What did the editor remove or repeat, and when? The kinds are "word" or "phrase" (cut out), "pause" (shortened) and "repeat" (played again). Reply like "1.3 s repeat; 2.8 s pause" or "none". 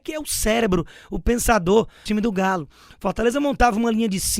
2.1 s word